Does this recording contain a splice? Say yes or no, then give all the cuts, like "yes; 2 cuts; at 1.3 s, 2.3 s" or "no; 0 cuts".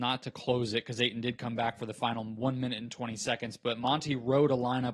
no; 0 cuts